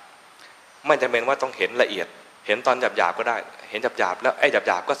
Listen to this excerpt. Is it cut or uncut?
cut